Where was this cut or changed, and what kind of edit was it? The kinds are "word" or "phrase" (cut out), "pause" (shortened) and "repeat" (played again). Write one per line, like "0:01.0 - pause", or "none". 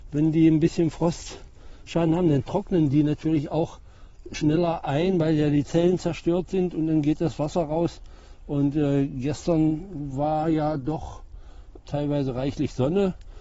none